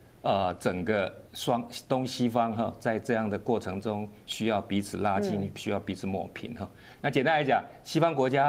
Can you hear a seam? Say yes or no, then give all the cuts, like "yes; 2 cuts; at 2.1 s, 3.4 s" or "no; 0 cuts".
yes; 1 cut; at 1.3 s